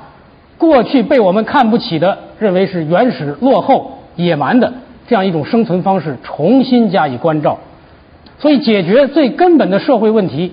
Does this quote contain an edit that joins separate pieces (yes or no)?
no